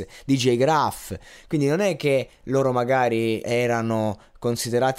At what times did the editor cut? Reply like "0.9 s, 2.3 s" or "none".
3.4 s